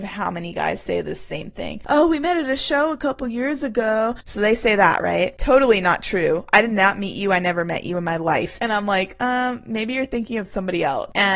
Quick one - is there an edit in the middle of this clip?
no; 0 cuts

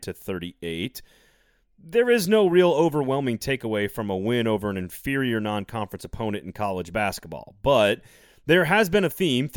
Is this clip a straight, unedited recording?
yes; 0 cuts

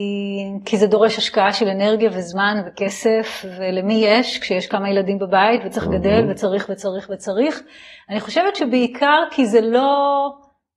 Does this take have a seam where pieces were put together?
no; 0 cuts

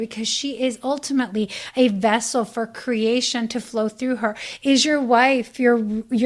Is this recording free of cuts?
yes; 0 cuts

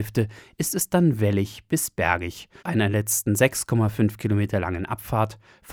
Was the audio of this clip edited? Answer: yes; 1 cut; at 2.6 s

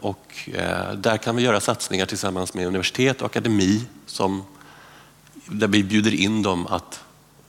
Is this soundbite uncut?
yes; 0 cuts

